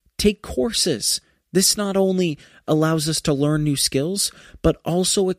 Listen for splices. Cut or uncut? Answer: uncut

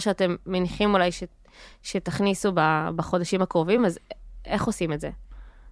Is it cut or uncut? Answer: uncut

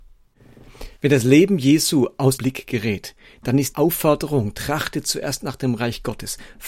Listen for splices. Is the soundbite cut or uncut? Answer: cut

